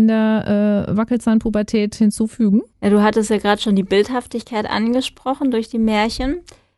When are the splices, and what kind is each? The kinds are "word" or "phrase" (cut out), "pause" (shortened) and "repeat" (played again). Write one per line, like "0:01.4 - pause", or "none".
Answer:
0:02.7 - pause